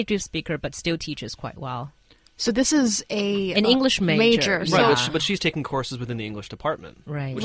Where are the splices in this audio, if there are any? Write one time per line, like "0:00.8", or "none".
none